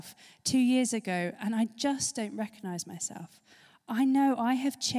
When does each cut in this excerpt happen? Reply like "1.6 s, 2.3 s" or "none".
none